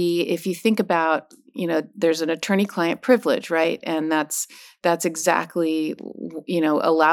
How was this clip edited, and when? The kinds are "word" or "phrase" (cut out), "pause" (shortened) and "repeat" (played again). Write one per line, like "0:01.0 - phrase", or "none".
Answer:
none